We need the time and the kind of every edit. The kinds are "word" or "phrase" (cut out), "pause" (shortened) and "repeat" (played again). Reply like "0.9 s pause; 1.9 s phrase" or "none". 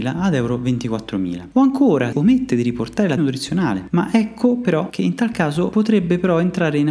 2.1 s word; 3.2 s word